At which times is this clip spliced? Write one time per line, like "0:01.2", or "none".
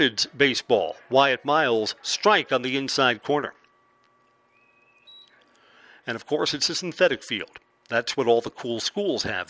none